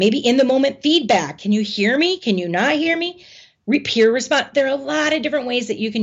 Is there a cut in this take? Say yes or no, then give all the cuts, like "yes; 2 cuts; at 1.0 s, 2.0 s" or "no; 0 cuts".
no; 0 cuts